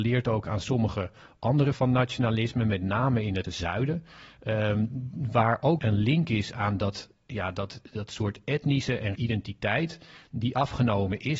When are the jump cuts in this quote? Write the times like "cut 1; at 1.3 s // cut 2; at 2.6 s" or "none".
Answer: cut 1; at 1.7 s // cut 2; at 3.4 s // cut 3; at 5.8 s // cut 4; at 9.2 s